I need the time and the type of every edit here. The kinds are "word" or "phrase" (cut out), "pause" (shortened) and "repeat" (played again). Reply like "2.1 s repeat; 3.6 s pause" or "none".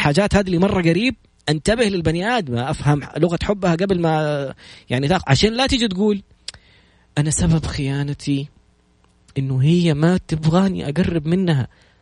none

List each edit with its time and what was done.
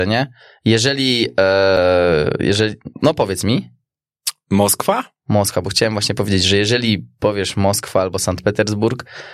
2.9 s pause

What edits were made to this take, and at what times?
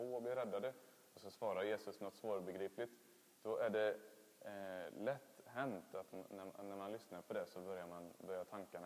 none

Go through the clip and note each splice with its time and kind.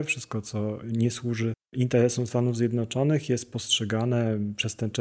none

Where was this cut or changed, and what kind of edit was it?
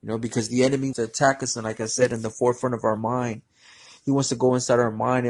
0.9 s word

